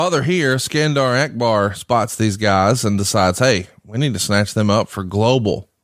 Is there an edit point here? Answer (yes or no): no